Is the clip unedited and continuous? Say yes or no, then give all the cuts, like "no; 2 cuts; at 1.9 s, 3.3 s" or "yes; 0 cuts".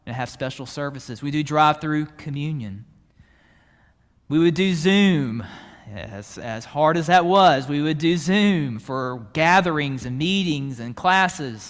yes; 0 cuts